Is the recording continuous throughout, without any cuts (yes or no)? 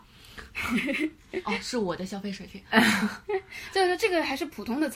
yes